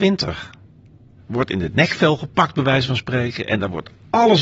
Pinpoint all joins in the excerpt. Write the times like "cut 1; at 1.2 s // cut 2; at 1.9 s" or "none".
none